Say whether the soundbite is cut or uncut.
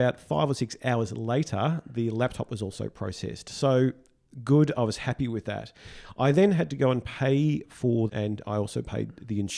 cut